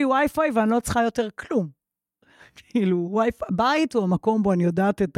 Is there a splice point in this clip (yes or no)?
no